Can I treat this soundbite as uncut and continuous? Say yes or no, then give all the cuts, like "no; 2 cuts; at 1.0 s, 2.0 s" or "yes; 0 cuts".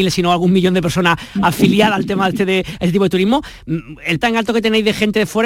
no; 1 cut; at 4.2 s